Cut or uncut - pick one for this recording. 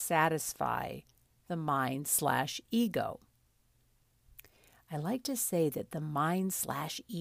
uncut